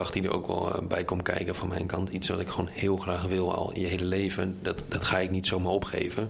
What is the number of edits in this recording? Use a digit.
0